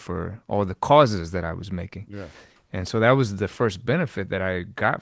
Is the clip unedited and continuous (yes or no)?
yes